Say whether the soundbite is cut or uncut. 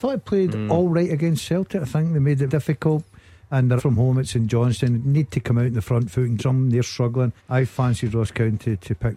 cut